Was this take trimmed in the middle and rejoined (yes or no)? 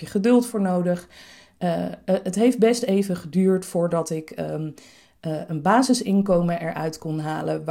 no